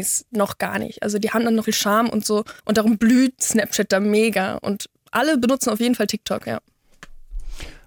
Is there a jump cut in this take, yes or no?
yes